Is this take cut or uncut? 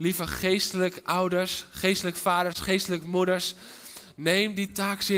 uncut